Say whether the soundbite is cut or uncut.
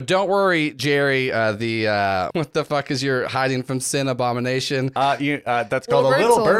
cut